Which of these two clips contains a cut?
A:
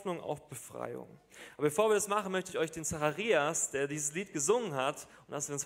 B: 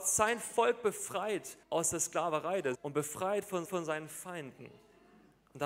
B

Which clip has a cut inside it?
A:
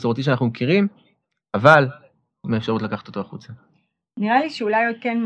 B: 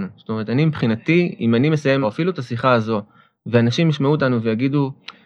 B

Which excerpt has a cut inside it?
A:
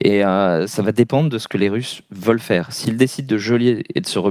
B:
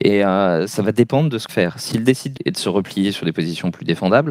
B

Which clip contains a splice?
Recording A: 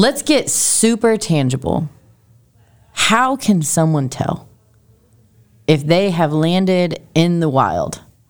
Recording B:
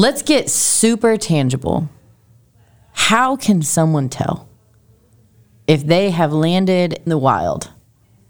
B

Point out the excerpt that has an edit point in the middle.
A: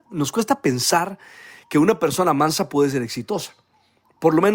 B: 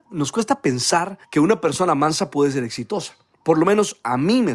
B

